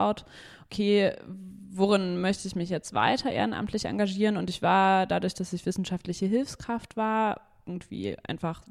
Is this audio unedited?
yes; 0 cuts

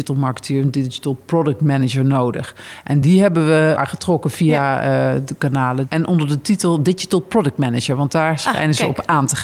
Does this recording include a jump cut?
no; 0 cuts

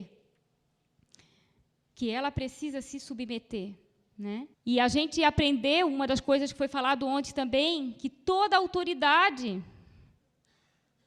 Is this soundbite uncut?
no; 1 cut; at 4.5 s

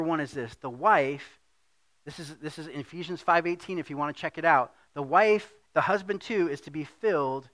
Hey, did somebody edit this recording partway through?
no; 0 cuts

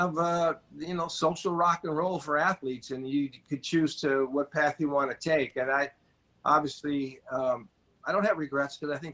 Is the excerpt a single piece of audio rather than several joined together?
yes; 0 cuts

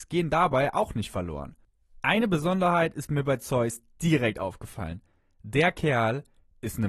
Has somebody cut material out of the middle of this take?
no; 0 cuts

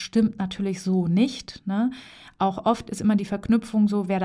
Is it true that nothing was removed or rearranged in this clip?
yes; 0 cuts

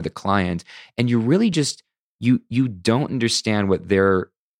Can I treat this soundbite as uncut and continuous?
yes; 0 cuts

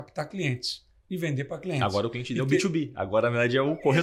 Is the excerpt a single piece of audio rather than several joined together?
yes; 0 cuts

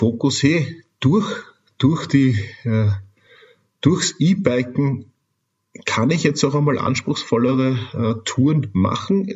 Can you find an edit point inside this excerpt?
no; 0 cuts

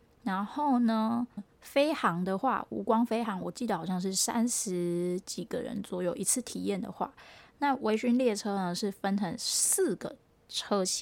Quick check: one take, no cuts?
no; 1 cut; at 1.4 s

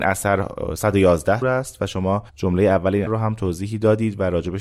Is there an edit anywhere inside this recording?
yes; 3 cuts; at 1.4 s, 2.3 s, 3.1 s

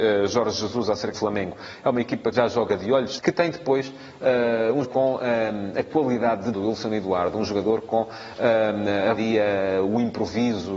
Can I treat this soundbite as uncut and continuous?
no; 6 cuts; at 1.1 s, 2.3 s, 3.2 s, 4.8 s, 6.5 s, 9.2 s

